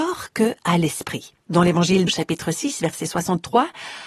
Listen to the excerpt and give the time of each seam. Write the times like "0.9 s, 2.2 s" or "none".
1.4 s, 2.1 s